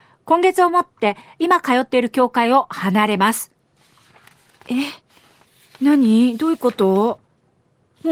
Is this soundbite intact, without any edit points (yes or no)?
yes